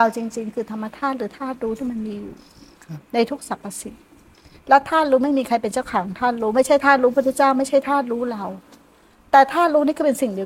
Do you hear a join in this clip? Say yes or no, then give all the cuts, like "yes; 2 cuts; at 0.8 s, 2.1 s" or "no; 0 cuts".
no; 0 cuts